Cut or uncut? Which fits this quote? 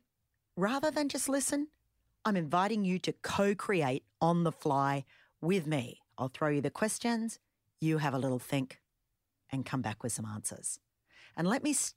uncut